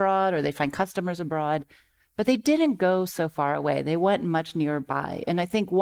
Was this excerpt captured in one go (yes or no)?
yes